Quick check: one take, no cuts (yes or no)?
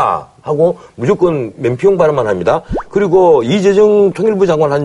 yes